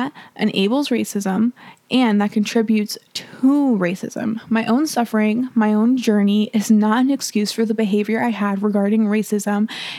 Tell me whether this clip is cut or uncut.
uncut